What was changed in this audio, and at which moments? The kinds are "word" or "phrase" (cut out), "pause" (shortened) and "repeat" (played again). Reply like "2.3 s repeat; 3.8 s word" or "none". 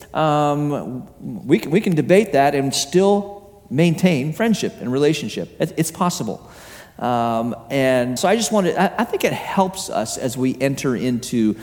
8.2 s word